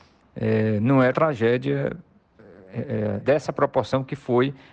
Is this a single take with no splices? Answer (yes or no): no